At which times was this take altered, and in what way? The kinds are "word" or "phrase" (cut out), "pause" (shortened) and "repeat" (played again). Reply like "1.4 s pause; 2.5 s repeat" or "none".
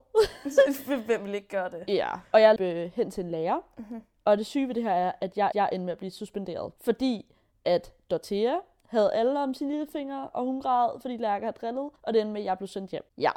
2.3 s pause; 2.6 s word; 5.5 s repeat; 6.8 s pause; 12.0 s pause